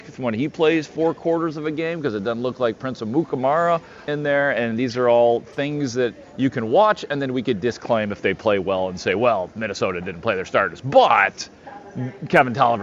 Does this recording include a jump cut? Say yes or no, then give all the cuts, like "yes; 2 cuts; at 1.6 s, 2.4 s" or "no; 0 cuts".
yes; 1 cut; at 4.1 s